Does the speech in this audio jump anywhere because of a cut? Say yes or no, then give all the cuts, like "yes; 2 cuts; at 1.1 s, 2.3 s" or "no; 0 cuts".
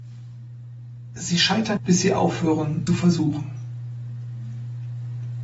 yes; 2 cuts; at 1.8 s, 2.9 s